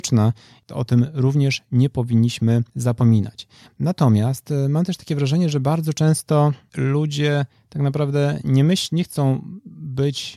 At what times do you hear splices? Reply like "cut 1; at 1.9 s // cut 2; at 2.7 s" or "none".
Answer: cut 1; at 2.7 s